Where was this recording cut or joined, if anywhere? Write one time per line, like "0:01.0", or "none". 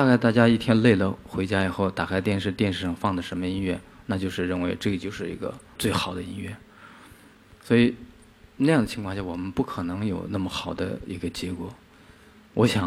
0:05.8